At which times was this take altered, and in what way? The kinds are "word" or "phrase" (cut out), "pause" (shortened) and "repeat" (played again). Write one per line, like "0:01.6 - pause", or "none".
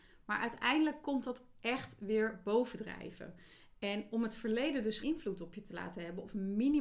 0:05.0 - word